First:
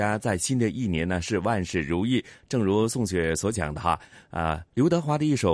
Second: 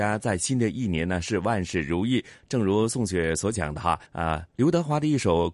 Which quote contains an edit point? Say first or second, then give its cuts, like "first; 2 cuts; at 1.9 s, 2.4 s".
second; 1 cut; at 4.1 s